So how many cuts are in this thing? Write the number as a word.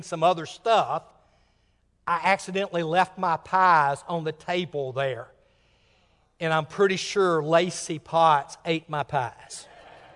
zero